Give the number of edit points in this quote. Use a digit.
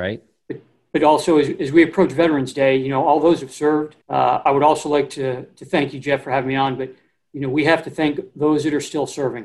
1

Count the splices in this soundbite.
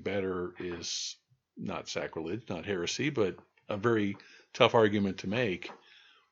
0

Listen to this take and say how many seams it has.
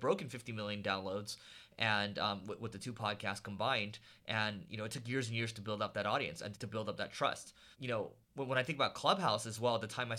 3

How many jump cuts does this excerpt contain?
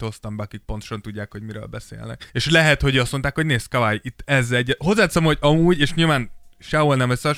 1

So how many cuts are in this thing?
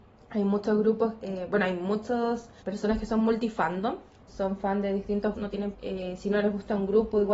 5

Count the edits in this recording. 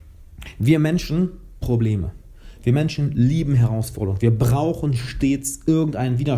1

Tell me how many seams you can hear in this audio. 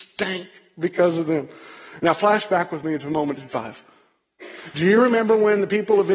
1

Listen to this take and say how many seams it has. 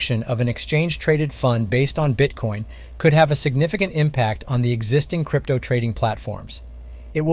0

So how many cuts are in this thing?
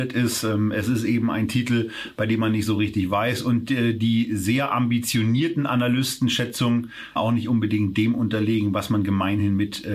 1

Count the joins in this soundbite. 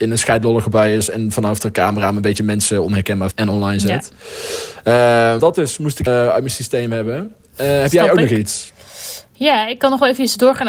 3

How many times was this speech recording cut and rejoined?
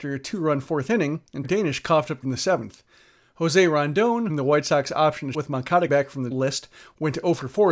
6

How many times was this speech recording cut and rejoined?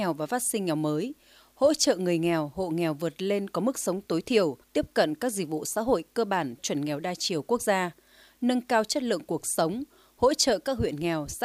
2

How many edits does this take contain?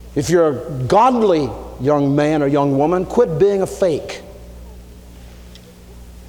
0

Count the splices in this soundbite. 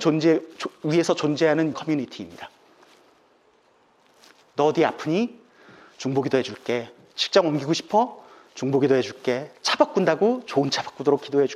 1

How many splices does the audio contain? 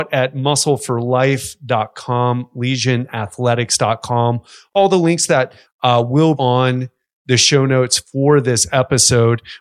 2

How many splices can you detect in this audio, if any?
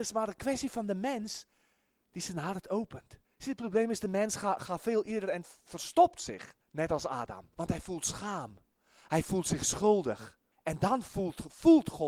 4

